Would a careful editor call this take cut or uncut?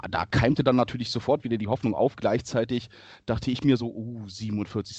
uncut